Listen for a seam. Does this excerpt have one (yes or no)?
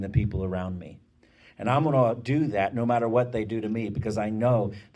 no